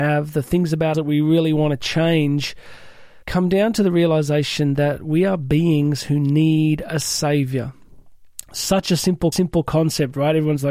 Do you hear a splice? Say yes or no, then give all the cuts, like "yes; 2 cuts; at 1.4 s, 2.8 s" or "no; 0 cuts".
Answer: yes; 3 cuts; at 0.9 s, 3.2 s, 9.3 s